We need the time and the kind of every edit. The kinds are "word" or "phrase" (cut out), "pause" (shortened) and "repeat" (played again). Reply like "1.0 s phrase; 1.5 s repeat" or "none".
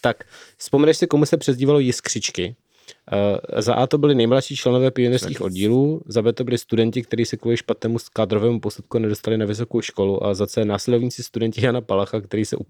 none